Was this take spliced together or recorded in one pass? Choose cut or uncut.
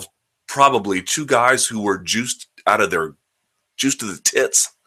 uncut